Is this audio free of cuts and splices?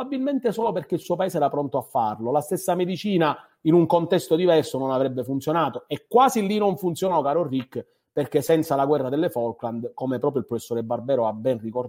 yes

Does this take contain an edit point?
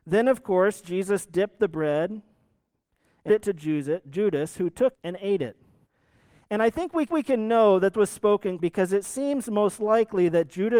yes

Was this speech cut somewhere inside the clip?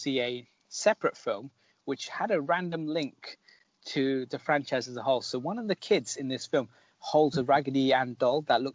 no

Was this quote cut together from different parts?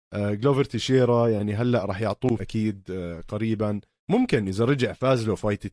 yes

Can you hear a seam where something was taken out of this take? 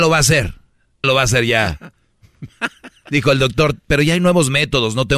yes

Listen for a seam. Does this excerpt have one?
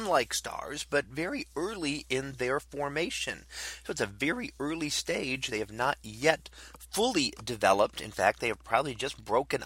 no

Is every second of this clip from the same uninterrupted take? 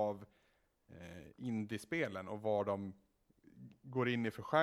yes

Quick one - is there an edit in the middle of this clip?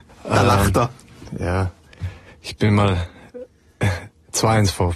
no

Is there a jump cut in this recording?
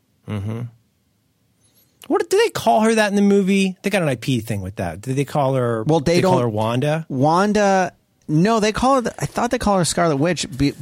no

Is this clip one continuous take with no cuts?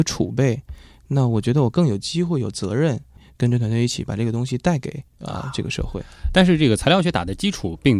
no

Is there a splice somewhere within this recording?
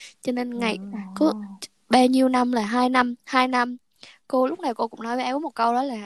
no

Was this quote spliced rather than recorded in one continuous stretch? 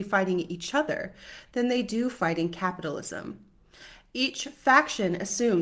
no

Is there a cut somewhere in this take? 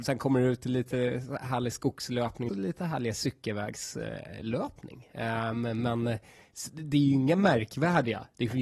yes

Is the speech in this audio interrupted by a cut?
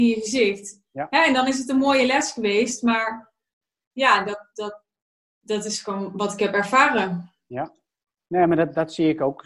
no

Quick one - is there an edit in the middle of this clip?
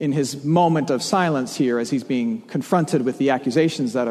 no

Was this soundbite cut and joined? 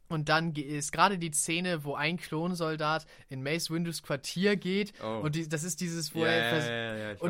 no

